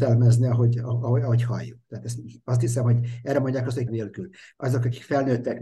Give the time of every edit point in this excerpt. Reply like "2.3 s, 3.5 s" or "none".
3.9 s